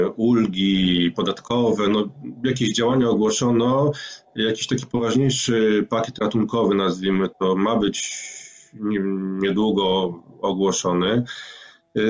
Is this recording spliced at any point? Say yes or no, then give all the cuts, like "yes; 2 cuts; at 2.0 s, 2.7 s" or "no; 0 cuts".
no; 0 cuts